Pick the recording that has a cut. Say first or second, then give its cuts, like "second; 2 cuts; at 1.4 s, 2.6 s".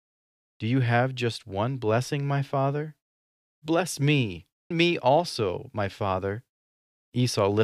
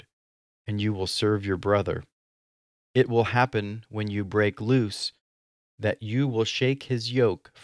first; 1 cut; at 4.7 s